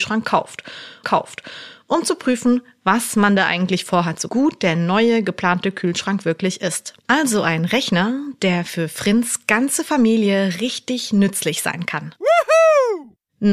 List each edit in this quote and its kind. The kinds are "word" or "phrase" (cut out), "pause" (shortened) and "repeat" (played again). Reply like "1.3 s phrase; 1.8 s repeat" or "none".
1.0 s repeat; 4.3 s phrase; 7.0 s pause; 12.2 s pause

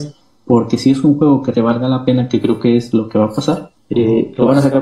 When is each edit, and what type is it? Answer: 1.5 s word; 3.8 s pause

